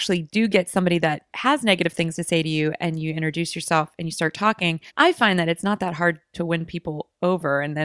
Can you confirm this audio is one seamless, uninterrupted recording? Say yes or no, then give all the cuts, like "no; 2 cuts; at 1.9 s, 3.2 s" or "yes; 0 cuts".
no; 1 cut; at 4.9 s